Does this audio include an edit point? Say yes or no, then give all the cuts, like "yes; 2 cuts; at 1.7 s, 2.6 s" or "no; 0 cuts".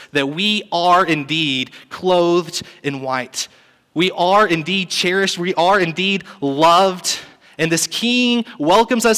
no; 0 cuts